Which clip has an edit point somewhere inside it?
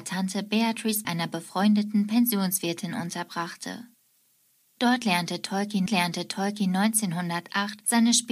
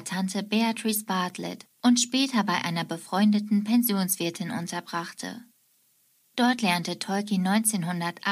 first; 2 cuts; at 1.0 s, 5.9 s

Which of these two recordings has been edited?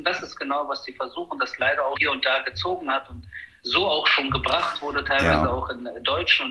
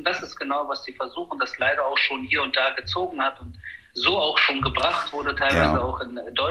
first; 1 cut; at 1.9 s

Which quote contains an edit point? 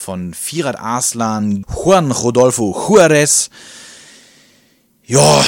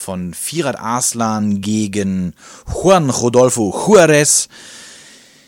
first; 1 cut; at 1.6 s

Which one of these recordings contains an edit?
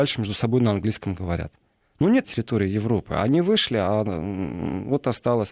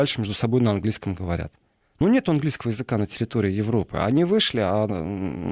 first; 1 cut; at 2.2 s

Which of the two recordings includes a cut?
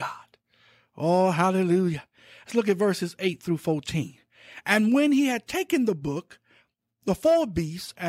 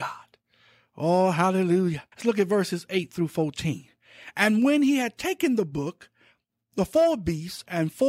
second; 1 cut; at 2.1 s

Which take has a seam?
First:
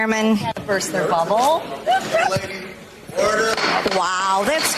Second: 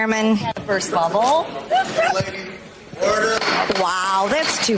second; 1 cut; at 0.9 s

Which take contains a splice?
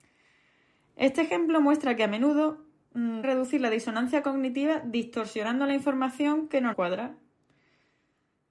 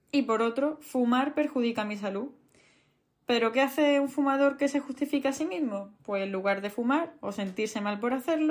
first; 2 cuts; at 3.2 s, 6.7 s

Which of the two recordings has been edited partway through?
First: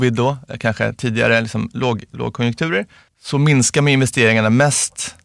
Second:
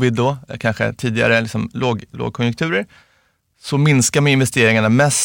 first; 1 cut; at 3.1 s

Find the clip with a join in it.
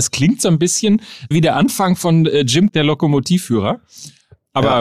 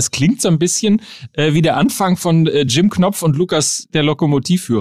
first; 2 cuts; at 1.3 s, 2.7 s

